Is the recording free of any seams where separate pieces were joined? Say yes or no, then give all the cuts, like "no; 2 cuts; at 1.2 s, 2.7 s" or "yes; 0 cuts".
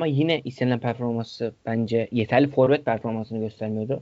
yes; 0 cuts